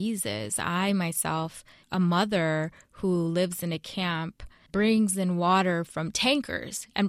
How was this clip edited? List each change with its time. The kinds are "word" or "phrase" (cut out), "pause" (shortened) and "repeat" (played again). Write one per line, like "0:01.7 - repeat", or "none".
0:01.8 - word
0:04.7 - word